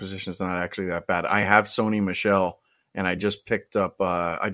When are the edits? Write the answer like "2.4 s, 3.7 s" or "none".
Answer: none